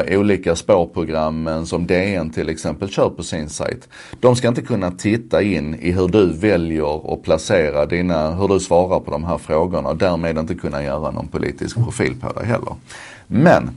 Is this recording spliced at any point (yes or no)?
no